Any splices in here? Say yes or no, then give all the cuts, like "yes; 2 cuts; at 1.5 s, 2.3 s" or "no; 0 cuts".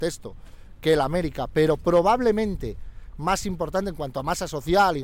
no; 0 cuts